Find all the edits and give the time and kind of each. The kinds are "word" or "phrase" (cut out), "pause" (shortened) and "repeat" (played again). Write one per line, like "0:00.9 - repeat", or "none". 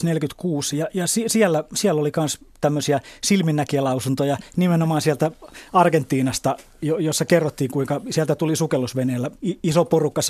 0:09.4 - pause